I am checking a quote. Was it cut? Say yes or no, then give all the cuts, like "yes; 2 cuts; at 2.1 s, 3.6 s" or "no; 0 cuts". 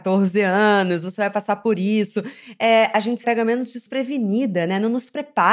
yes; 1 cut; at 3.2 s